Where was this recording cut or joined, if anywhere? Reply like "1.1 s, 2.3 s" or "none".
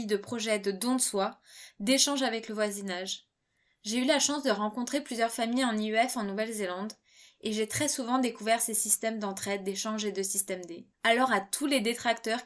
10.9 s